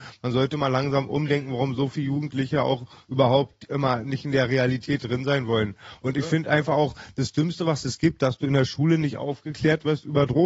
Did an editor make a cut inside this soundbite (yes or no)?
no